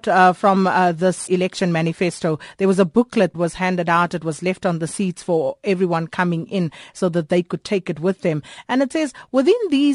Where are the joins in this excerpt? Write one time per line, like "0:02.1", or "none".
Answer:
0:01.3
0:03.3